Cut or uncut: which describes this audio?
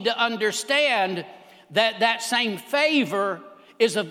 uncut